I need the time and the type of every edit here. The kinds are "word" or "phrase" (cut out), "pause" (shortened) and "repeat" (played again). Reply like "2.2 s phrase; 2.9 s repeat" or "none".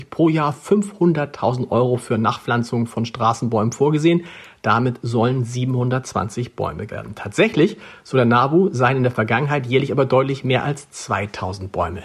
6.9 s word